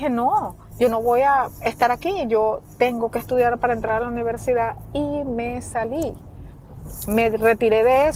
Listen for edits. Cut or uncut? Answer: uncut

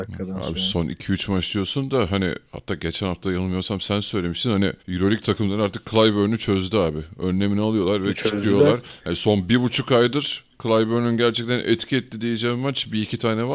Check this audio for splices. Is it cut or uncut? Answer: cut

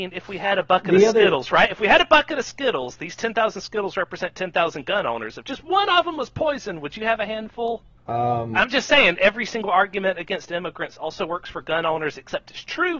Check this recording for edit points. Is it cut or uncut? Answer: cut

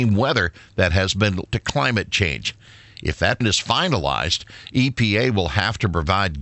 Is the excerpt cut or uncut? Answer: cut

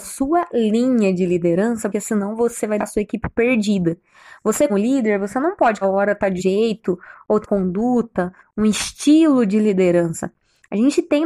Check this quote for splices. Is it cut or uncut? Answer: cut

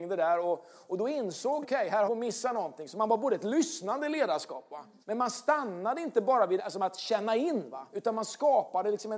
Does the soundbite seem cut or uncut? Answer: cut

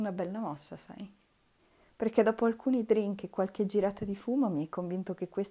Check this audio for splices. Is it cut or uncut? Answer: uncut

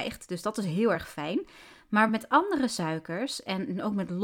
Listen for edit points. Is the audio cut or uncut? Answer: uncut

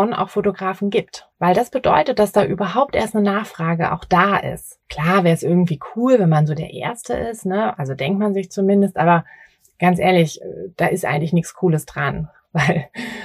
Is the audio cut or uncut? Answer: cut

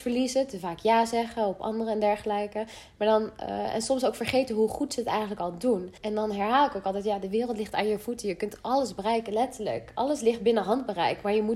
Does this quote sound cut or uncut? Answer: cut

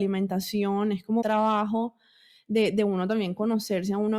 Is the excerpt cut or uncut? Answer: cut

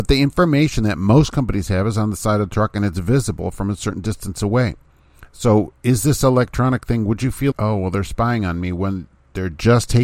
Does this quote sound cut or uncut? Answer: cut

